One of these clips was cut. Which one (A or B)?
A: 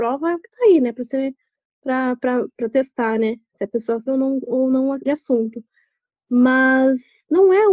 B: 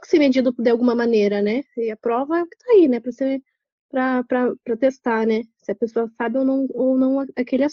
A